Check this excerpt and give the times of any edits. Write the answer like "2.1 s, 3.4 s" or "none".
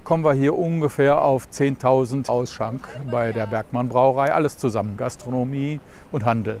2.3 s, 5.0 s